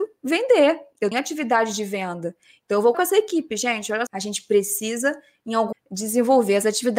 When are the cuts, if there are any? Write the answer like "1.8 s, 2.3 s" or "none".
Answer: 1.1 s, 2.9 s, 4.1 s, 5.7 s